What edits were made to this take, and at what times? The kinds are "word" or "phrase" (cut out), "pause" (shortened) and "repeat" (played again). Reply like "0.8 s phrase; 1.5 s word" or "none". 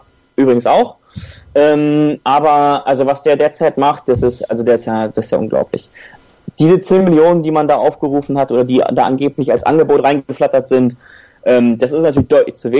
none